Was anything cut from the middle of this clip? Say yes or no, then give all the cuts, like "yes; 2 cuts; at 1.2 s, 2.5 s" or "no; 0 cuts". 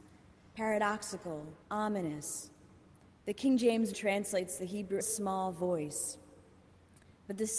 yes; 3 cuts; at 1.6 s, 3.9 s, 5.0 s